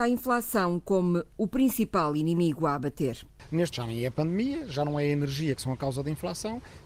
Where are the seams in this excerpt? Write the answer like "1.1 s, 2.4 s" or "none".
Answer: 3.7 s